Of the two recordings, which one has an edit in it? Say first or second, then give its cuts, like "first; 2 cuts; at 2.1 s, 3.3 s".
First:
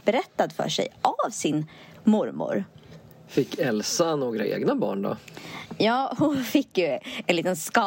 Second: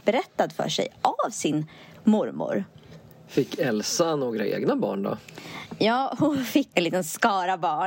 second; 1 cut; at 6.7 s